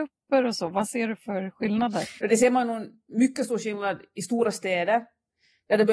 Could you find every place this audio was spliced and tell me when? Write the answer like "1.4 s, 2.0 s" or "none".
2.2 s

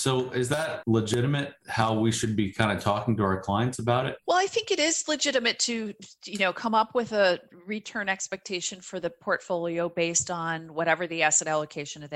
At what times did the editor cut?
none

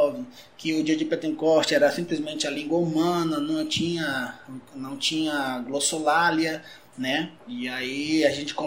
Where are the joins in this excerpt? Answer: 7.4 s

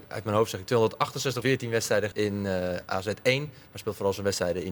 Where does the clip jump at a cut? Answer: 1.4 s, 2.1 s

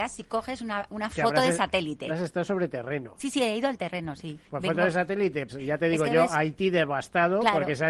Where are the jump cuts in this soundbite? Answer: 2.1 s, 4.4 s, 5.5 s

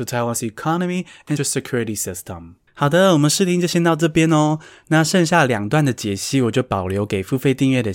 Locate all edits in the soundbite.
1.4 s, 2.7 s

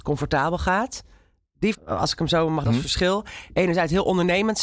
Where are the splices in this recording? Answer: 1.7 s, 2.6 s

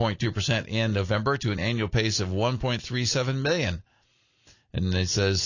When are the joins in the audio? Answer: none

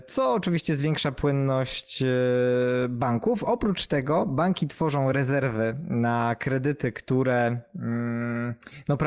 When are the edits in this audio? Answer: none

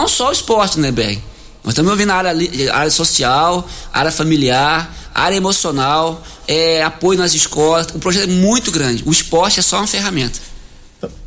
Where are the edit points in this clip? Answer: none

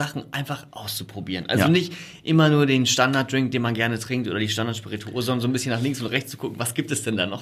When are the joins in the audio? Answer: none

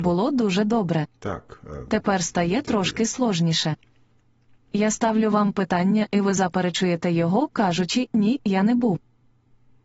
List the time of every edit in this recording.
1.2 s

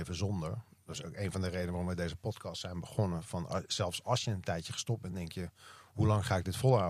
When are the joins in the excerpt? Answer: none

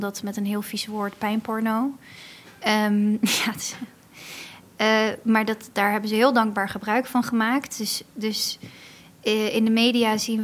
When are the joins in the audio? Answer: none

